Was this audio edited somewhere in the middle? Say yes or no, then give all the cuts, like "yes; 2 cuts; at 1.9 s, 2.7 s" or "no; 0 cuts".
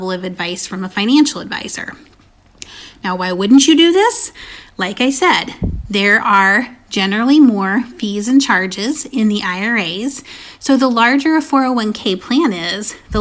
no; 0 cuts